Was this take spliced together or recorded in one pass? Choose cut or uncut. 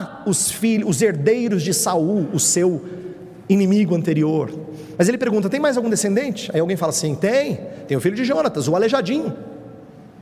uncut